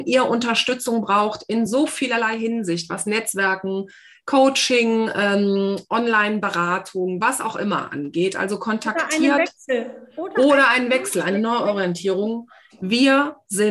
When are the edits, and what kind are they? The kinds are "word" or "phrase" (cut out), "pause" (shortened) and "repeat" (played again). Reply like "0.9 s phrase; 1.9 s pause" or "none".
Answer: none